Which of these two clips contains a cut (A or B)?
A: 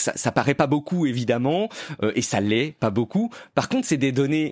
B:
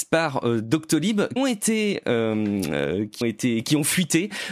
B